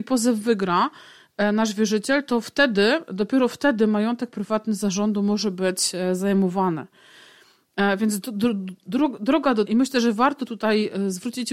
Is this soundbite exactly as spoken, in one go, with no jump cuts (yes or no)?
no